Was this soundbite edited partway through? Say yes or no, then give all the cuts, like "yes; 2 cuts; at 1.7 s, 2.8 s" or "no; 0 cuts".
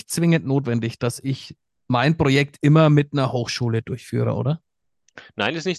no; 0 cuts